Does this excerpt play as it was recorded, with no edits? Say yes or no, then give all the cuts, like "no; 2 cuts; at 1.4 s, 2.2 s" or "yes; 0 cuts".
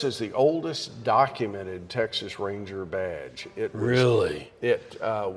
yes; 0 cuts